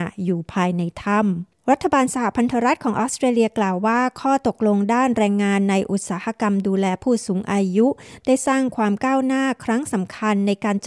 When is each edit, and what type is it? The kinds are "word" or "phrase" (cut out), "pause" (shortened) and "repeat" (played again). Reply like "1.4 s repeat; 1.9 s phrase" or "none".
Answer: 1.5 s pause

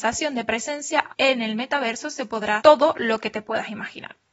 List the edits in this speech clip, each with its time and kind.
1.1 s word; 2.6 s word

